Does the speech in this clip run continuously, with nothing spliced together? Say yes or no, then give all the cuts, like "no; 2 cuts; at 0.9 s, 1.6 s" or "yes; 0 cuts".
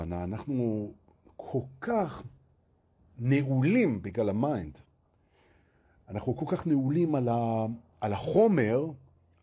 yes; 0 cuts